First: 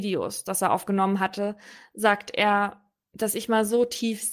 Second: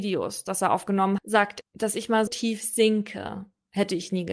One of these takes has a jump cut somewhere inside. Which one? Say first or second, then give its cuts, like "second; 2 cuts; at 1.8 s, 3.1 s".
second; 3 cuts; at 1.2 s, 1.6 s, 2.3 s